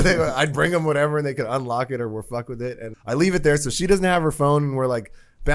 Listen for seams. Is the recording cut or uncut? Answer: cut